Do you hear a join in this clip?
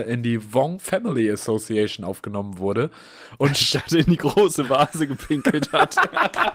no; 0 cuts

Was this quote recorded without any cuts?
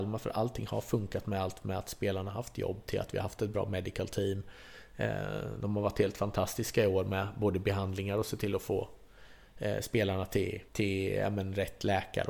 no; 1 cut; at 10.7 s

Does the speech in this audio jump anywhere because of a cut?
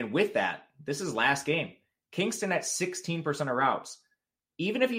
no; 0 cuts

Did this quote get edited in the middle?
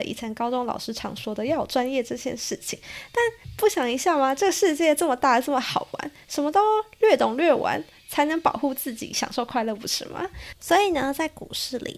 no; 0 cuts

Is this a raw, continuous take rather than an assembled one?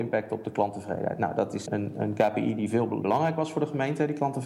no; 2 cuts; at 1.7 s, 3.0 s

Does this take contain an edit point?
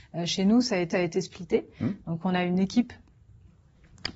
yes; 1 cut; at 0.9 s

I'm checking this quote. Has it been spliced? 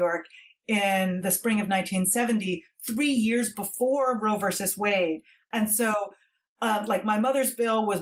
no; 0 cuts

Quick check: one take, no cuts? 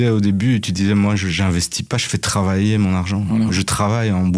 yes; 0 cuts

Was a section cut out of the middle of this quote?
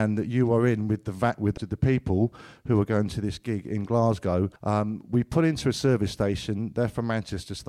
yes; 2 cuts; at 1.6 s, 4.6 s

